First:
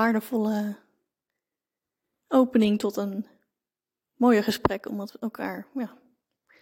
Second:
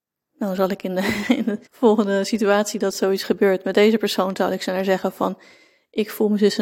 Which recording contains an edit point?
second; 1 cut; at 1.7 s

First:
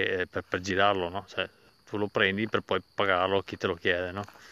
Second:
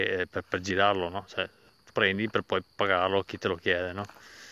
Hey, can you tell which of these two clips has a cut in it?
second; 1 cut; at 1.9 s

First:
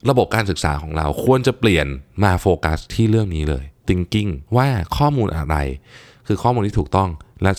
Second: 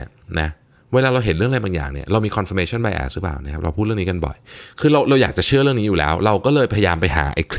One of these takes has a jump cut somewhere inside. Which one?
first; 2 cuts; at 3.8 s, 4.5 s

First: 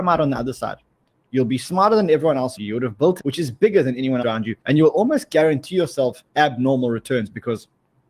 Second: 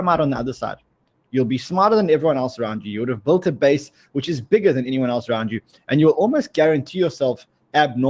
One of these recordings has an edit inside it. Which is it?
first; 5 cuts; at 2.6 s, 3.2 s, 4.2 s, 4.6 s, 6.3 s

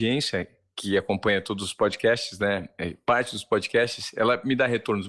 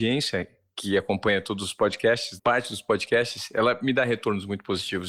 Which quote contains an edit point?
second; 1 cut; at 2.4 s

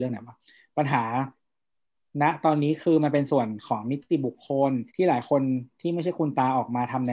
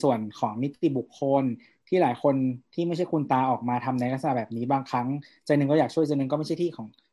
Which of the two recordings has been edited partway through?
first; 1 cut; at 4.9 s

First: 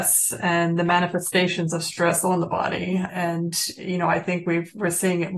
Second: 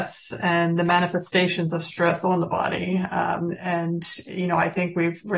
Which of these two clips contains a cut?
first; 1 cut; at 3.1 s

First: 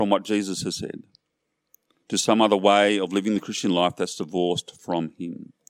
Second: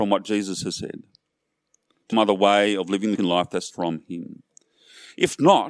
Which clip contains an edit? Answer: second; 3 cuts; at 2.1 s, 3.2 s, 3.7 s

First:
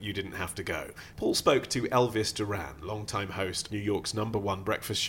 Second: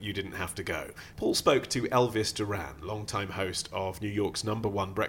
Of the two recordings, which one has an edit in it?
first; 1 cut; at 3.7 s

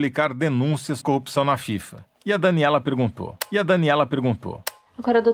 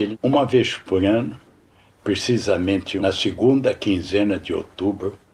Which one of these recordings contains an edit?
first; 3 cuts; at 1.0 s, 2.1 s, 3.5 s

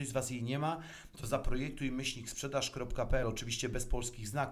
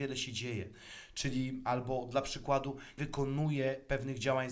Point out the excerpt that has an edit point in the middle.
second; 1 cut; at 3.0 s

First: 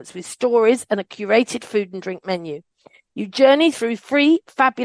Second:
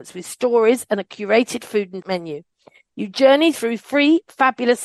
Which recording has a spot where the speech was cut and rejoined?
second; 1 cut; at 2.0 s

